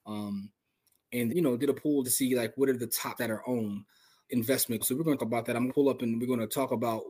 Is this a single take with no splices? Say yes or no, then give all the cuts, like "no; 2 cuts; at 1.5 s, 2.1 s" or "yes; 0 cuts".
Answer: no; 7 cuts; at 1.3 s, 2.0 s, 3.2 s, 4.2 s, 4.8 s, 5.2 s, 5.7 s